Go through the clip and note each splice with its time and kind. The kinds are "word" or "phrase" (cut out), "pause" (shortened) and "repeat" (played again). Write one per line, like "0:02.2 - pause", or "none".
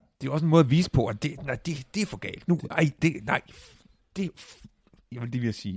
none